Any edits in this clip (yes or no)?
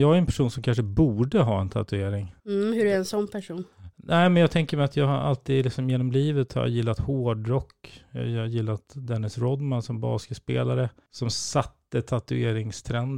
yes